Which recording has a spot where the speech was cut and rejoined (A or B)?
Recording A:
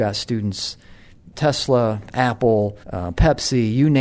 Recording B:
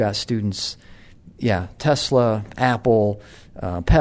A